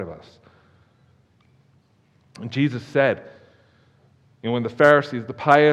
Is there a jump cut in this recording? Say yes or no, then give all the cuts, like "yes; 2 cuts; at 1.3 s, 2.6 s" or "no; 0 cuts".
no; 0 cuts